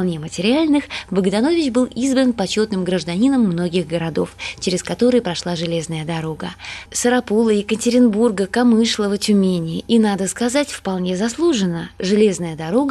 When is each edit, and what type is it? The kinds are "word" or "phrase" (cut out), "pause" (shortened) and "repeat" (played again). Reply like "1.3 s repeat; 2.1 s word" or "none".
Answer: none